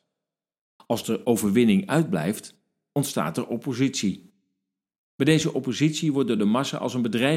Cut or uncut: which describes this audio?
uncut